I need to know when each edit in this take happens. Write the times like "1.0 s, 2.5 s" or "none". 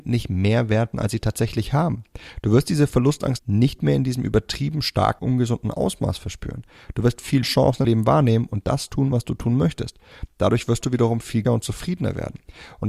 0.9 s, 3.4 s, 5.2 s, 7.4 s, 7.8 s, 11.4 s